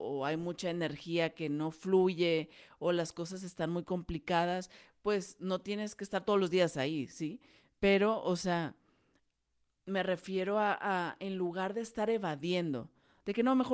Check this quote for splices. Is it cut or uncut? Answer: uncut